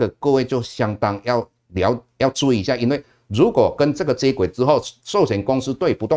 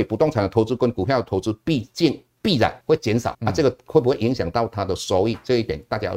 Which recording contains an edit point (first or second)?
second